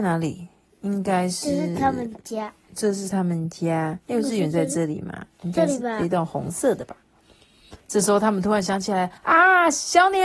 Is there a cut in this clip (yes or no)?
yes